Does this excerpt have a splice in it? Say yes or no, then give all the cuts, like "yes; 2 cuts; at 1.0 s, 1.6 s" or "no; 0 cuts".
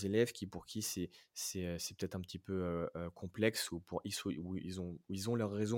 no; 0 cuts